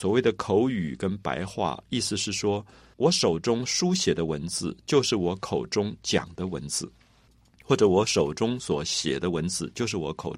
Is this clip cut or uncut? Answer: uncut